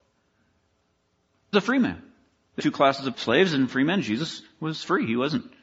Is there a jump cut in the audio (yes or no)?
yes